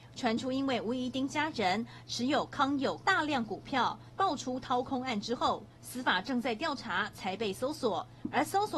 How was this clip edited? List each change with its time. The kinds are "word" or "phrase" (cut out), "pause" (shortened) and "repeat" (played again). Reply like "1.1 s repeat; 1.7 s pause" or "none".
3.0 s word